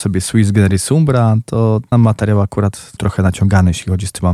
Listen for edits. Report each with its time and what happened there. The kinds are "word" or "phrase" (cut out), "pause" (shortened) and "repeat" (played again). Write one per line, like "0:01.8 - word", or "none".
0:01.9 - word
0:03.0 - word